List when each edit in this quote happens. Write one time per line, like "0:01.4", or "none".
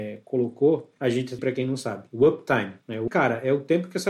0:01.0
0:01.4
0:03.1

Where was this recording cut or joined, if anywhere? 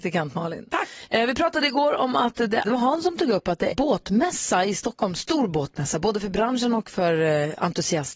0:02.6
0:03.7

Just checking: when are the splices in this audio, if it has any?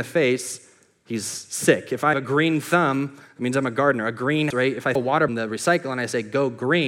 0:02.1
0:04.5
0:05.0
0:05.3

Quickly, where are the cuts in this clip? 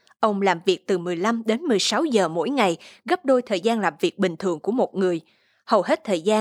none

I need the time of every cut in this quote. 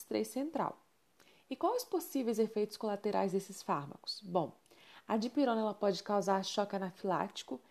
0:01.2

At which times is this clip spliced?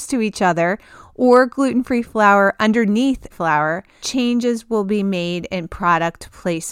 0:03.3
0:04.0

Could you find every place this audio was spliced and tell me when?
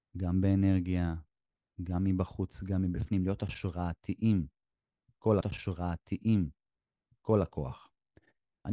0:05.4

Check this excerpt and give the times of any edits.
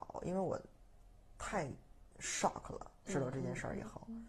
0:02.1

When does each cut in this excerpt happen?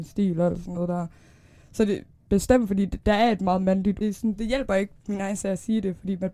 0:04.0

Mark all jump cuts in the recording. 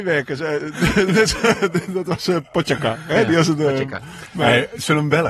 0:02.5

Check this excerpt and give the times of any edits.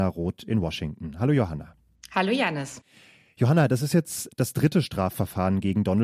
none

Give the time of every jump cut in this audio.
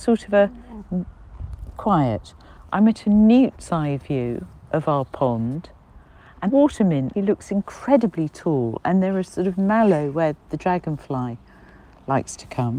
0:01.7
0:06.5
0:07.1

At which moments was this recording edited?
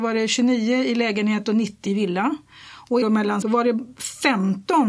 0:01.9
0:03.0
0:03.4

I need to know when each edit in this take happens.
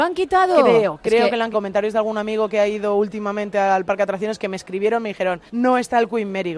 0:01.5
0:05.5

